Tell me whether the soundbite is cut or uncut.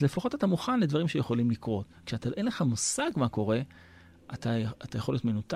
uncut